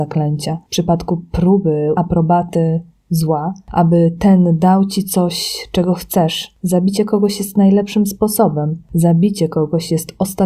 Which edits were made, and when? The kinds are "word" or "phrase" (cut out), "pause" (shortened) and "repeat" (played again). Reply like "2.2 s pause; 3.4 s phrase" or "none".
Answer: 2.0 s word